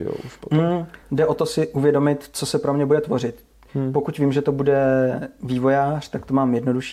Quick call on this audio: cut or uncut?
uncut